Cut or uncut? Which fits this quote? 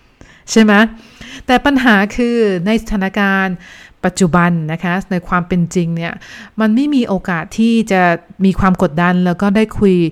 uncut